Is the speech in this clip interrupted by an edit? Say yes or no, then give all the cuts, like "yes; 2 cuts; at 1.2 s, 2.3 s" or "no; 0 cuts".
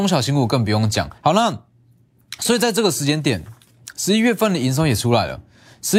yes; 1 cut; at 1.2 s